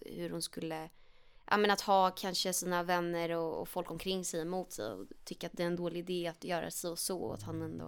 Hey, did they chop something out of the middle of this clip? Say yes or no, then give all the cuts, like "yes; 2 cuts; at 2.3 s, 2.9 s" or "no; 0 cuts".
no; 0 cuts